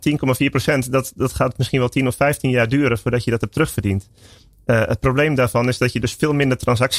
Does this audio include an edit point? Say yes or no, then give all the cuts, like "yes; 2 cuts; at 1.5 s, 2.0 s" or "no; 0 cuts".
no; 0 cuts